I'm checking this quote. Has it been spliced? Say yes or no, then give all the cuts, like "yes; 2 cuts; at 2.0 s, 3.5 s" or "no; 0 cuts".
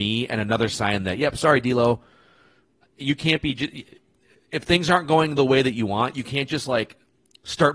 no; 0 cuts